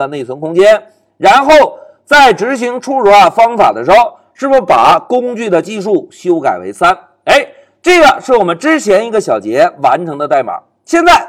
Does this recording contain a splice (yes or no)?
no